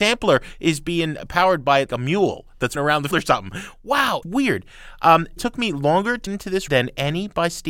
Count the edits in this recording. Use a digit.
7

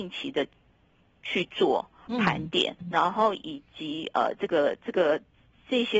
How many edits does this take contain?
1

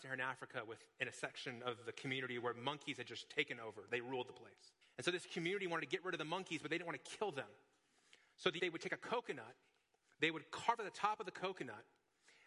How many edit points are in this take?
2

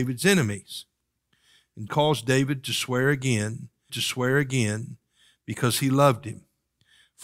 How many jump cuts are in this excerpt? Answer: 2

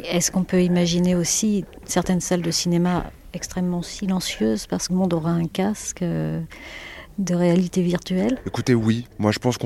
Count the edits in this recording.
1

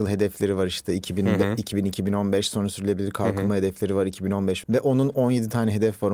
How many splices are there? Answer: 1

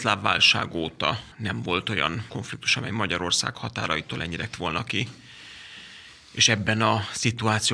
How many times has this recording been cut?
3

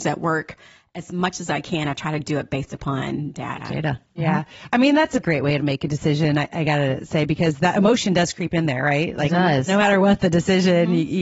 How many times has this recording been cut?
1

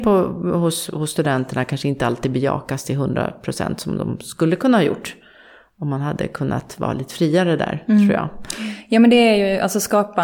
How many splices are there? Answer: 0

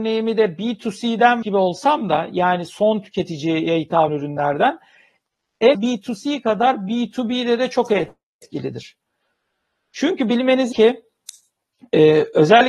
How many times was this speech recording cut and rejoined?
4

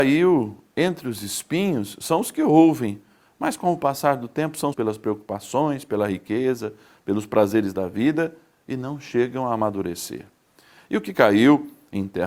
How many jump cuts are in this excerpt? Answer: 1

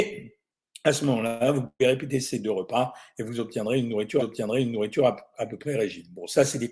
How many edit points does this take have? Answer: 1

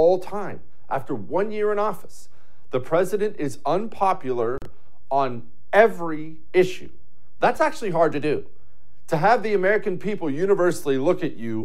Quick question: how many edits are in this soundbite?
0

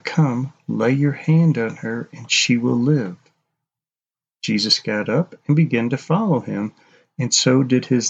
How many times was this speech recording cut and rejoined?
0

